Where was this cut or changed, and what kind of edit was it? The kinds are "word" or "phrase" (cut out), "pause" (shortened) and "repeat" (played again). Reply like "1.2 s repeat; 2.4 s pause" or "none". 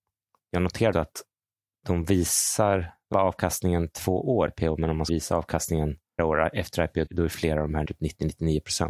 0.9 s word; 3.1 s word; 4.5 s word; 5.1 s word; 6.2 s word; 7.1 s word; 7.8 s word